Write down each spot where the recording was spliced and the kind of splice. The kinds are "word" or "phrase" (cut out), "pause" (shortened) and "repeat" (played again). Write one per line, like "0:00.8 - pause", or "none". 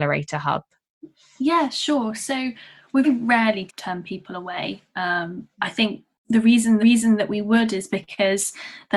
0:03.0 - word
0:03.7 - word
0:06.8 - repeat